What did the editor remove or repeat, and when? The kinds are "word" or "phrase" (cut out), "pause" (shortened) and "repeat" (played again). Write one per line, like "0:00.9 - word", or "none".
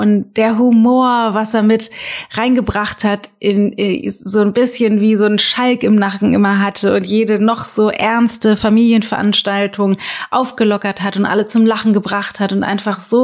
none